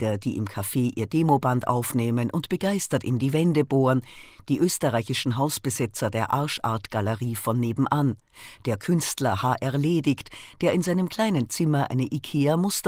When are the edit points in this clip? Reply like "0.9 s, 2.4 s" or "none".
none